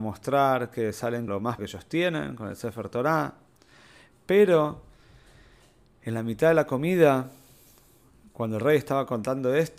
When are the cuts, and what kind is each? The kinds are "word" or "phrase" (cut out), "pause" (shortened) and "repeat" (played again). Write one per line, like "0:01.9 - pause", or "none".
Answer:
0:01.3 - word
0:01.6 - word